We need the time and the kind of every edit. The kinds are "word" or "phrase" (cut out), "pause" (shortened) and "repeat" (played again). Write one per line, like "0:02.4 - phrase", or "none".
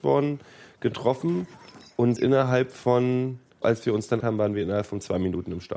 0:02.2 - word
0:03.6 - word
0:04.2 - word